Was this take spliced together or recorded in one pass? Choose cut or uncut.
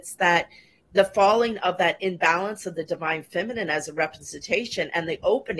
uncut